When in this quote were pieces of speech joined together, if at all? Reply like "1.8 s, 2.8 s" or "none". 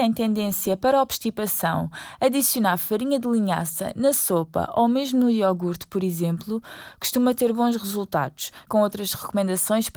8.7 s